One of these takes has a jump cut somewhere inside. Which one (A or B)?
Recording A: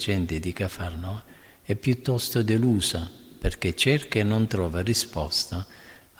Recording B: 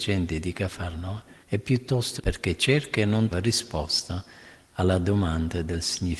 B